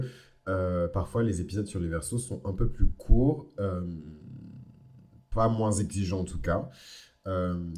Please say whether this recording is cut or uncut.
uncut